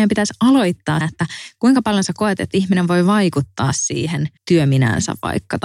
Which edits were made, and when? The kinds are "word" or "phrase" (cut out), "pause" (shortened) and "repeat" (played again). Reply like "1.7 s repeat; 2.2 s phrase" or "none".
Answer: 1.0 s word; 4.4 s pause